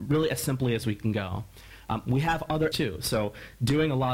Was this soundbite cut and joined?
yes; 2 cuts; at 1.0 s, 2.7 s

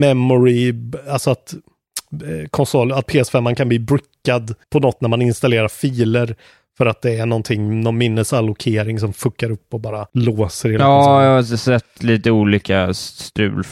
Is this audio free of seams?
no; 3 cuts; at 4.6 s, 5.0 s, 10.1 s

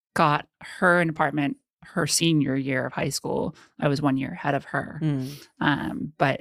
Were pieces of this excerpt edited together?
no; 0 cuts

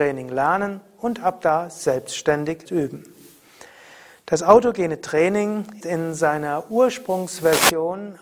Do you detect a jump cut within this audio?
yes; 2 cuts; at 2.7 s, 5.8 s

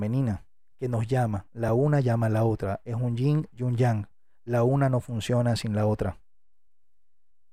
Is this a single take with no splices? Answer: yes; 0 cuts

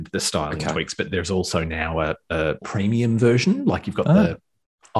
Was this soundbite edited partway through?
yes; 1 cut; at 2.6 s

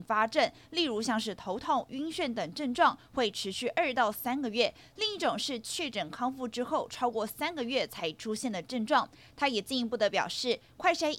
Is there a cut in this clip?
no; 0 cuts

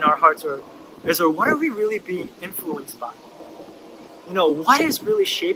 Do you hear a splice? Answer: no; 0 cuts

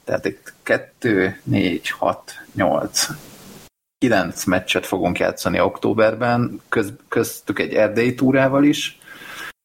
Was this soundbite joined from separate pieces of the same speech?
no; 0 cuts

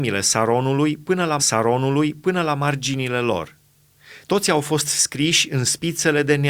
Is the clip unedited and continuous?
no; 1 cut; at 1.4 s

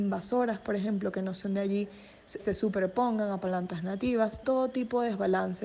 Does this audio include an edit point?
yes; 2 cuts; at 2.4 s, 4.4 s

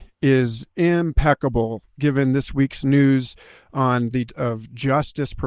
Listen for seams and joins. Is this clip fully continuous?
no; 1 cut; at 4.3 s

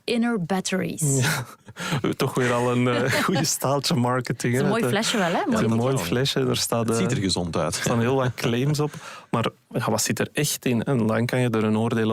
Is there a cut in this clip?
no; 0 cuts

